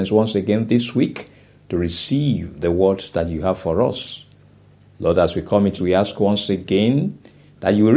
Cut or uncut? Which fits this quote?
cut